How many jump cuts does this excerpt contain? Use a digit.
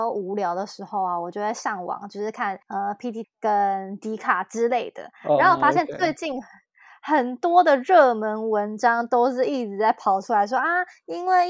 2